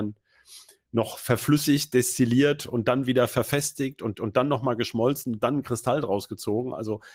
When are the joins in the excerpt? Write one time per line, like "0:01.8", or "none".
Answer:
0:04.1